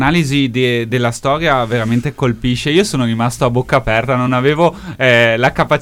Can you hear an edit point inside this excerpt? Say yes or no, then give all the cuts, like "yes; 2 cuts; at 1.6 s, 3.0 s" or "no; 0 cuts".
no; 0 cuts